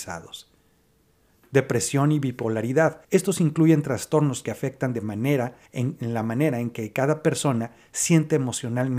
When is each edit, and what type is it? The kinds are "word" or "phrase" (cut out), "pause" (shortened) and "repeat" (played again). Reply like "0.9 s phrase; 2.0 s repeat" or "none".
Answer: 3.0 s pause; 5.7 s pause

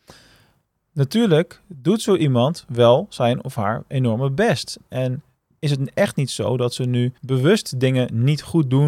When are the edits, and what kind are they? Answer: 7.2 s pause

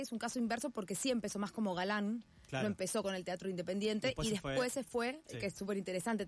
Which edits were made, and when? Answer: none

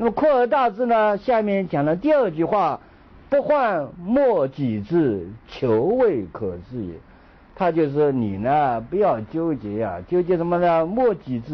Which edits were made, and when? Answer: none

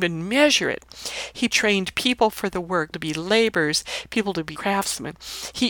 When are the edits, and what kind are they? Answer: 1.5 s word; 2.9 s word; 4.5 s word

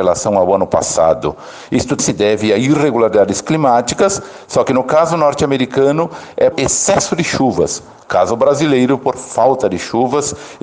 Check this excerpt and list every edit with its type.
2.0 s word; 6.5 s word

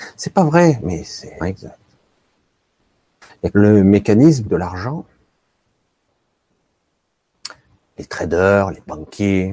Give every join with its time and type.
1.4 s word; 3.5 s word; 4.5 s word

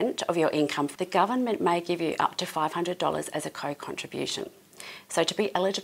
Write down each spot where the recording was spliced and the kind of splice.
0.9 s word

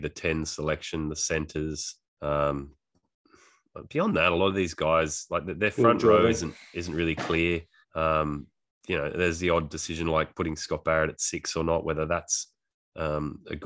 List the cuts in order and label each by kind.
2.0 s pause; 7.8 s pause

